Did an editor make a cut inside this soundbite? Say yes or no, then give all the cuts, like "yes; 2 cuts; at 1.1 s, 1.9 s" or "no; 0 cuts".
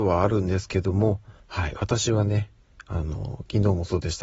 yes; 1 cut; at 1.4 s